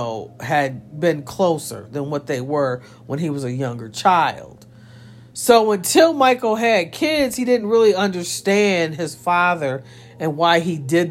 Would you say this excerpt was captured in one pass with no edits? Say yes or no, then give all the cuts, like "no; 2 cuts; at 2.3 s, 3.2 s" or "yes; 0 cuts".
yes; 0 cuts